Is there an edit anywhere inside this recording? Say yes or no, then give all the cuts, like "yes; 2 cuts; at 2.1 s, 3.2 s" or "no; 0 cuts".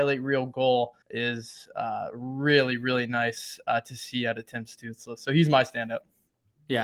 yes; 1 cut; at 1.0 s